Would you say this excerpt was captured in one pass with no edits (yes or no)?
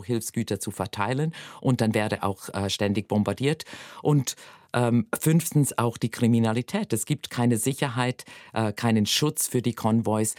yes